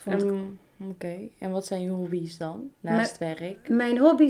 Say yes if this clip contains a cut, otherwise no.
yes